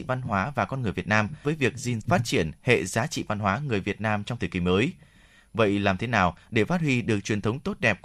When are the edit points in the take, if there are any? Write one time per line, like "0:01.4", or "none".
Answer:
0:01.4
0:02.0